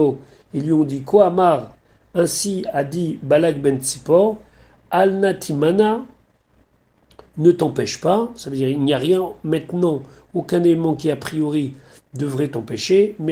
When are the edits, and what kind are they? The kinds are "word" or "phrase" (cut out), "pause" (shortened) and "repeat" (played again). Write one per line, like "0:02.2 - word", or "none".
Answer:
none